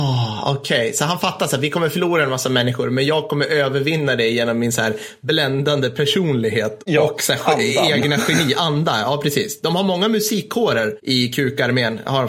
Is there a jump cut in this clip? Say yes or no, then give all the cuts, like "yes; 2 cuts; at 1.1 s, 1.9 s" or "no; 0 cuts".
no; 0 cuts